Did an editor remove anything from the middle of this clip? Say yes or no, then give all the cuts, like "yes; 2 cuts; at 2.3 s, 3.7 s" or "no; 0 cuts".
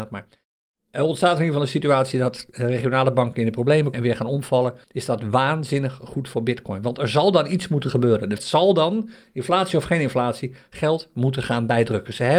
yes; 3 cuts; at 3.9 s, 4.8 s, 8.4 s